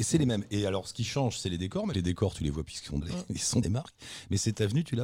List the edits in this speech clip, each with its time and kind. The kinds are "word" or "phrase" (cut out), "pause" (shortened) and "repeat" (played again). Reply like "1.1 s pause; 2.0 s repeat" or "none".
1.9 s phrase; 2.7 s word; 3.0 s word; 3.6 s word